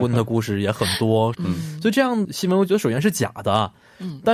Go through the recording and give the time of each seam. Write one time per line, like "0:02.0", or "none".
0:01.3
0:02.2